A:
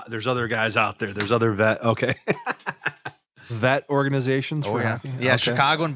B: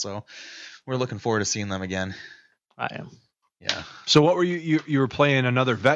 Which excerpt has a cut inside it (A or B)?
A